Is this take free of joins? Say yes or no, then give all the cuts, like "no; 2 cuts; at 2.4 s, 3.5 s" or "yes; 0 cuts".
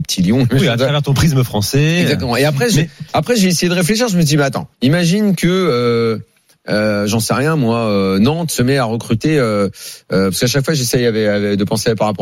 no; 1 cut; at 4.7 s